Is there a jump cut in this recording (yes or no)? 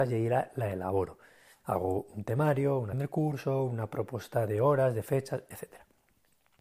yes